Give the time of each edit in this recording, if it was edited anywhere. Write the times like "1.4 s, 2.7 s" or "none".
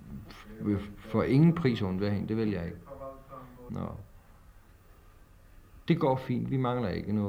3.7 s

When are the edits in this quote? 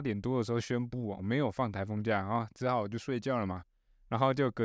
none

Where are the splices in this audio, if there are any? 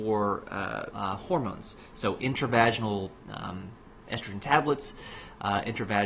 0.9 s

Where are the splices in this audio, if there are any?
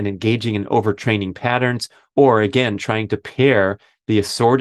none

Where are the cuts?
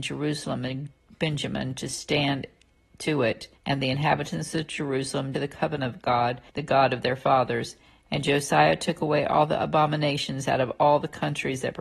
3.6 s, 5.3 s, 6.5 s

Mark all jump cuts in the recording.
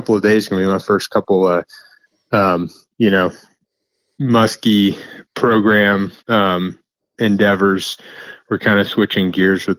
6.2 s

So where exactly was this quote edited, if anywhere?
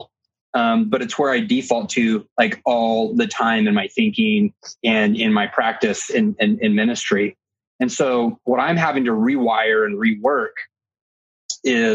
4.8 s

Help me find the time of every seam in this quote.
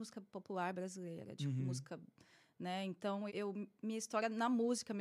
3.3 s

